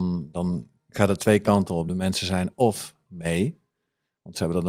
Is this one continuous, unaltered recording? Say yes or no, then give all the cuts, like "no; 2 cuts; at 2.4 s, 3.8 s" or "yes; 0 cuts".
yes; 0 cuts